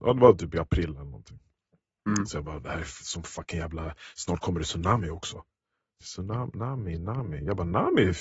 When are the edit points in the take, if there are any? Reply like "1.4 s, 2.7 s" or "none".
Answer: 6.0 s